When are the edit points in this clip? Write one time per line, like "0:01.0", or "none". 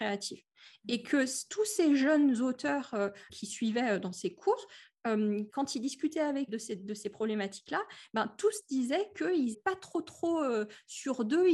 0:03.3
0:05.5
0:06.5
0:09.5